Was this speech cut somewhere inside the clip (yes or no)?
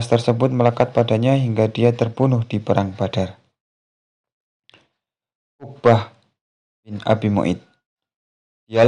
no